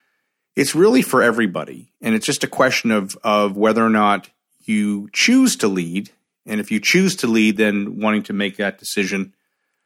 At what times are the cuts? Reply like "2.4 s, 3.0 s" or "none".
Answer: none

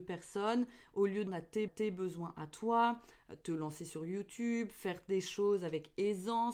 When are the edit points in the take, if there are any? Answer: 1.3 s, 1.7 s

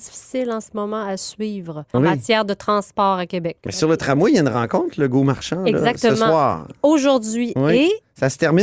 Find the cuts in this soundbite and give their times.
1.9 s

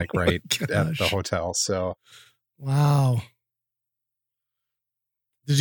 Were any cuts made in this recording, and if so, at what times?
none

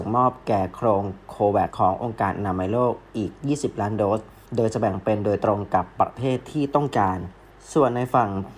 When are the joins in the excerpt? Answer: 1.7 s

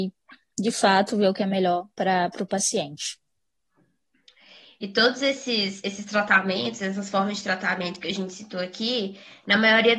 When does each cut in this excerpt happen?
none

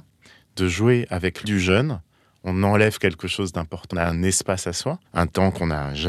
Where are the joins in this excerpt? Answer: 1.4 s, 3.9 s, 5.1 s

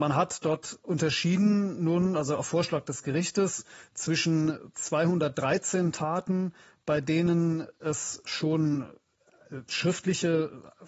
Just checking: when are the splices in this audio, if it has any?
none

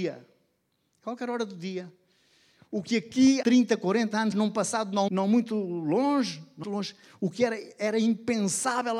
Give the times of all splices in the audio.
3.4 s, 4.3 s, 5.1 s, 6.6 s

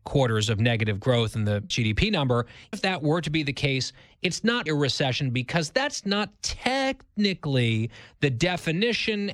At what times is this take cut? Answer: 1.7 s, 2.7 s, 4.7 s

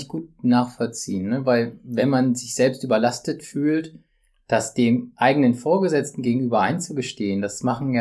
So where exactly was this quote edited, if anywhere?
none

